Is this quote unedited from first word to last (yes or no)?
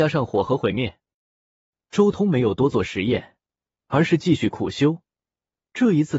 yes